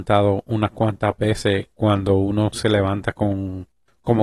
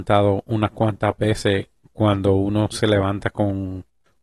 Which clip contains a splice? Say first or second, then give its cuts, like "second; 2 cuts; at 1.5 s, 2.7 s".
first; 1 cut; at 1.7 s